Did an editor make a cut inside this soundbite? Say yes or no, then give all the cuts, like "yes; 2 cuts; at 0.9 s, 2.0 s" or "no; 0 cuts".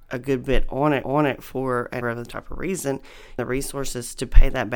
yes; 3 cuts; at 1.0 s, 2.0 s, 3.4 s